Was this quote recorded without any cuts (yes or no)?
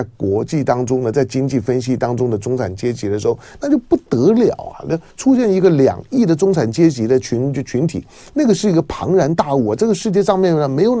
yes